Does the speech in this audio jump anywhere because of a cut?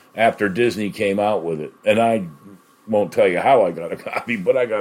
no; 0 cuts

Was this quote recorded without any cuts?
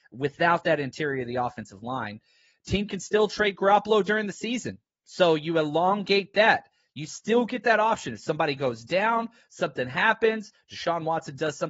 yes; 0 cuts

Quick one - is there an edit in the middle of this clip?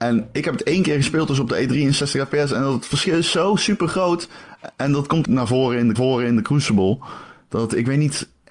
yes; 2 cuts; at 5.2 s, 5.9 s

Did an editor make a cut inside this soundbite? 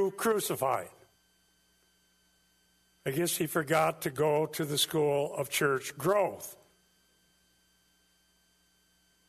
no; 0 cuts

